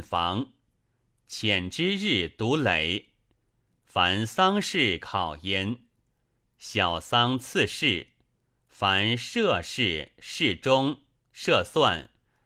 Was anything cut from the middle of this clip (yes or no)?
no